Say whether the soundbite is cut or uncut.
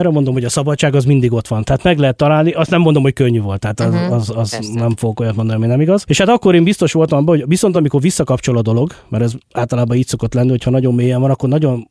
uncut